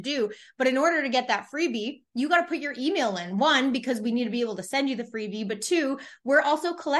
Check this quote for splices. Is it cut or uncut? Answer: uncut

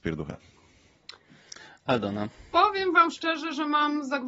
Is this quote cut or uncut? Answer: uncut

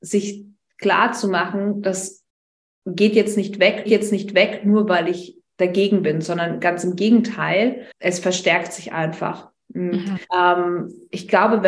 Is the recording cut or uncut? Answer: cut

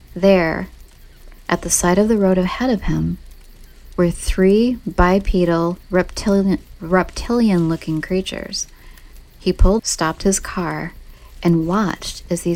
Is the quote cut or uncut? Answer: cut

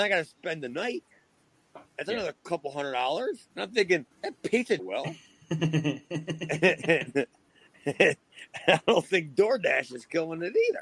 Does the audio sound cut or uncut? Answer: cut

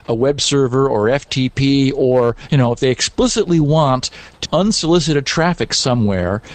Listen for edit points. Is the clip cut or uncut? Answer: cut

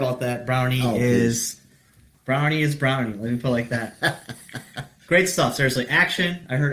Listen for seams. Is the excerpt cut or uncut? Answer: uncut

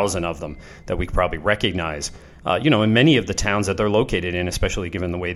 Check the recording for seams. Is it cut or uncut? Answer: uncut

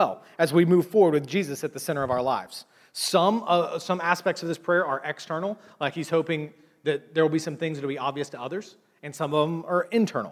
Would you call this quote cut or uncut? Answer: uncut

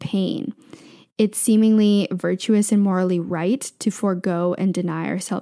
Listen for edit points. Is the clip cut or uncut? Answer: uncut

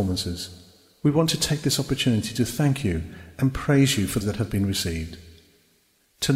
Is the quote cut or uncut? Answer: cut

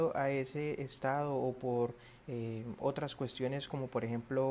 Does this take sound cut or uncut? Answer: uncut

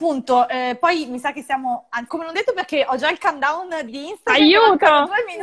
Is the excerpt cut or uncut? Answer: cut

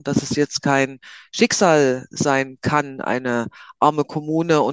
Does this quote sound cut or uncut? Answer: uncut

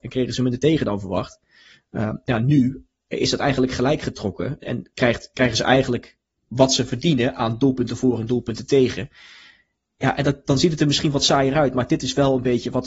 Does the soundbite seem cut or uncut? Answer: cut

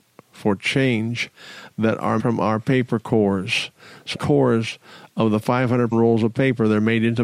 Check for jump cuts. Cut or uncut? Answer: cut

